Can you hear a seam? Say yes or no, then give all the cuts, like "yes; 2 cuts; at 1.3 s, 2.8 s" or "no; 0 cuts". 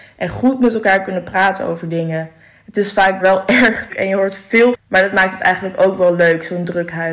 yes; 3 cuts; at 3.2 s, 3.9 s, 4.7 s